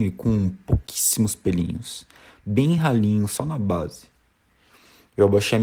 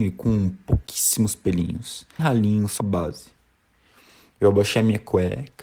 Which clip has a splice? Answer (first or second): second